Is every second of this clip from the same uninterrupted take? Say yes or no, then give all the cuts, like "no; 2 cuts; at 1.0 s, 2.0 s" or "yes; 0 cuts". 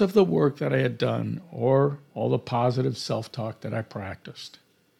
yes; 0 cuts